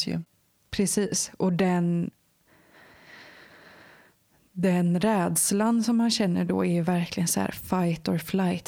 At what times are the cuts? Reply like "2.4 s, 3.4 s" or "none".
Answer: none